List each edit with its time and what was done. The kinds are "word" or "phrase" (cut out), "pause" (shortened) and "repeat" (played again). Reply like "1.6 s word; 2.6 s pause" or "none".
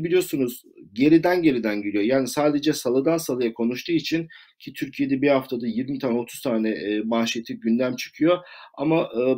none